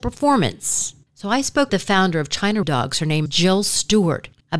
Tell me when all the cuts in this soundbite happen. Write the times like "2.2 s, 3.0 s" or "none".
1.7 s, 2.6 s, 3.3 s